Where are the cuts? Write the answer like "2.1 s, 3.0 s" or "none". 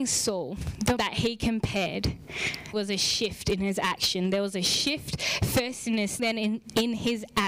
1.0 s, 2.7 s, 6.2 s